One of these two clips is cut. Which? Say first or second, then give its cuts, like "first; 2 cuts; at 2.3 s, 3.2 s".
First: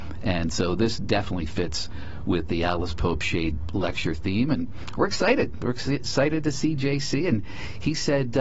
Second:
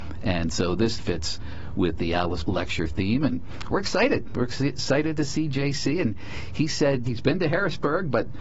second; 3 cuts; at 1.0 s, 2.4 s, 7.0 s